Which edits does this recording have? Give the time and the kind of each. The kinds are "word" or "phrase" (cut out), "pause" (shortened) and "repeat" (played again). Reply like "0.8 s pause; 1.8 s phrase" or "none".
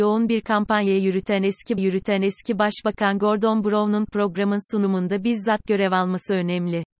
1.8 s repeat